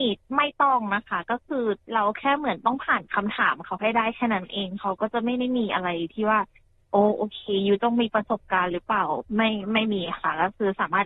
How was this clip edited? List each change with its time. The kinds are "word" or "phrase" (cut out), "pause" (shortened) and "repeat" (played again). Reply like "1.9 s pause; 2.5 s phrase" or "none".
1.8 s pause; 9.3 s pause